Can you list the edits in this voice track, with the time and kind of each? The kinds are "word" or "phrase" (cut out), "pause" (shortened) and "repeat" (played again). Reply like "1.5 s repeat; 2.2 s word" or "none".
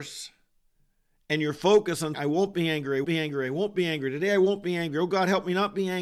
2.1 s word; 3.0 s word